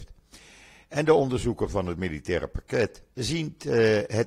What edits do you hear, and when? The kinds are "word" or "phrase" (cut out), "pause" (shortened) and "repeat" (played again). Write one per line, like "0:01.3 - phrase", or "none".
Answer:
0:03.1 - pause